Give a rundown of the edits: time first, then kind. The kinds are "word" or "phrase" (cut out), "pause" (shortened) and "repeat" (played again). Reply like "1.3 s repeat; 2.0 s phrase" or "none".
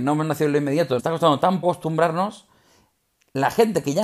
1.0 s word; 1.6 s word